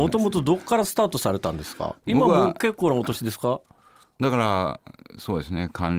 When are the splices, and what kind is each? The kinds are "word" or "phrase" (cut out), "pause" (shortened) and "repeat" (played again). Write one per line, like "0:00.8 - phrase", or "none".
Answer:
none